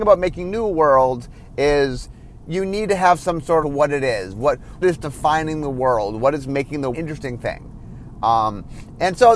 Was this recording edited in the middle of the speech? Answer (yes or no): yes